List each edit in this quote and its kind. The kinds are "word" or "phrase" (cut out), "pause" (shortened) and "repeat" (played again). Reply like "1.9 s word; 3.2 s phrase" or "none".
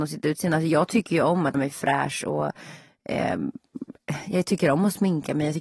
1.5 s word